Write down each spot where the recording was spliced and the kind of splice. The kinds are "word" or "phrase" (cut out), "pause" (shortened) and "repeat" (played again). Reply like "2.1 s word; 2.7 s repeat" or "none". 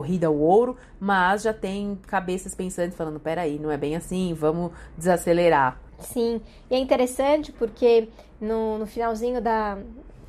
5.9 s pause